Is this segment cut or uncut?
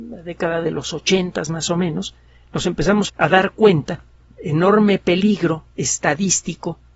cut